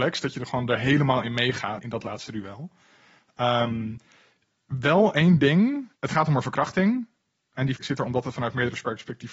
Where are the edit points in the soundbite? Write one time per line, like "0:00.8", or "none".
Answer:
0:01.8
0:06.0
0:07.8